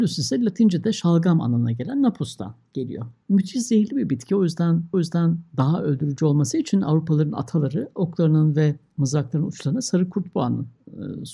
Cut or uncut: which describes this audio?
cut